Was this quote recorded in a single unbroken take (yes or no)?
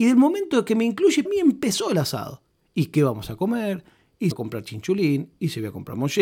no